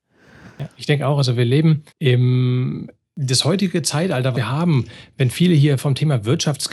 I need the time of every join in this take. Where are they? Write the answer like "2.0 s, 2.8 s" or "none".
1.9 s, 4.3 s